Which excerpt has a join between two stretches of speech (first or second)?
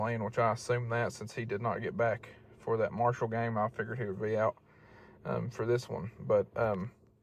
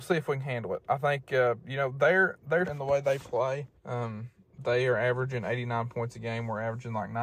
second